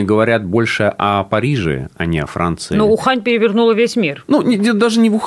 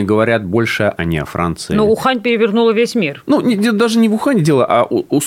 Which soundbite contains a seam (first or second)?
second